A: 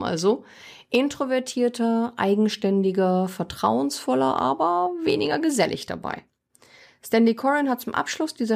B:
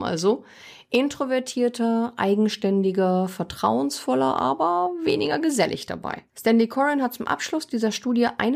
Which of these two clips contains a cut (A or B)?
B